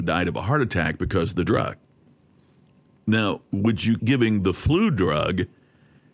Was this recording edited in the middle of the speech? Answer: yes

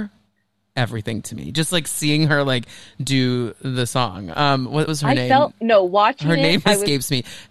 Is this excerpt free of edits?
no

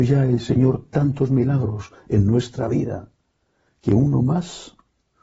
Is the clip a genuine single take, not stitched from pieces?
yes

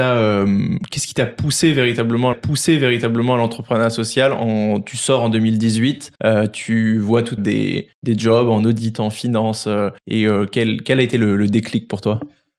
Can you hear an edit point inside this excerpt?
yes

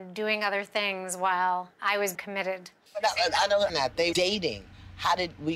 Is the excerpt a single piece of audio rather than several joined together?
no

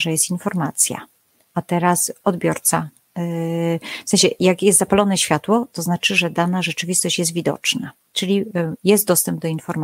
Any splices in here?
no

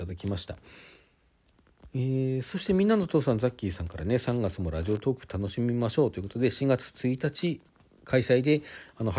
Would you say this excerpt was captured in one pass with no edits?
yes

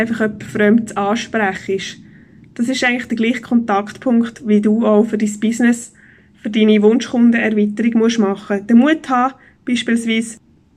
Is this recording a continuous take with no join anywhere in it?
yes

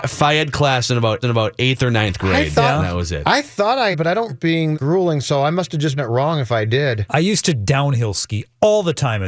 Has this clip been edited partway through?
yes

